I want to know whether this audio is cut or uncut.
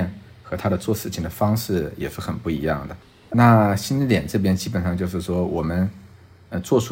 uncut